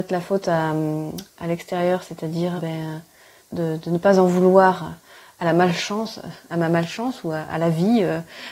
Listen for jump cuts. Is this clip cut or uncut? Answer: cut